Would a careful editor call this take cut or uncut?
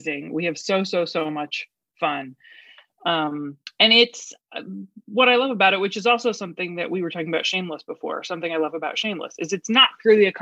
uncut